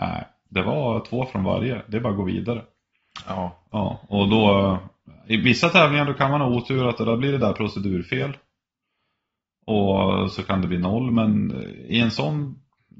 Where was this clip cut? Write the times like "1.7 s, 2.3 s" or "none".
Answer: 3.7 s